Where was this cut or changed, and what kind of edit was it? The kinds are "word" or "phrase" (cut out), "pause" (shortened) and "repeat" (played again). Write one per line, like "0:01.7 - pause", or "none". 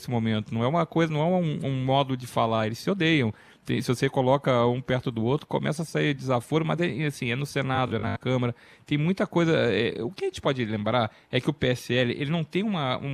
none